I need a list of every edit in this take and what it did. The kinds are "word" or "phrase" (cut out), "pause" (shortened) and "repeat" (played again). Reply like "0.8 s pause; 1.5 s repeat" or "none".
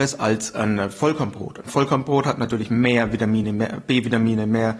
none